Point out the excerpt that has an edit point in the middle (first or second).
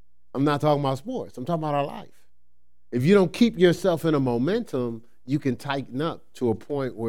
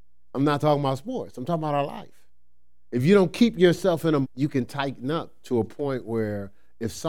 second